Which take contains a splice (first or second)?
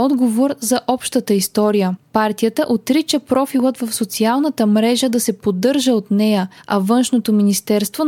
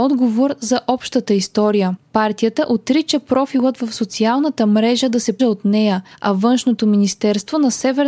second